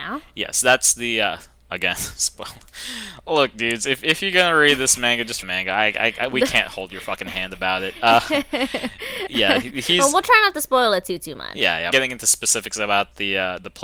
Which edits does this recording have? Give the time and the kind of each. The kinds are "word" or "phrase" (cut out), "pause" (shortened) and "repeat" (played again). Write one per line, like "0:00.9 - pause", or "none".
0:05.4 - phrase
0:11.9 - phrase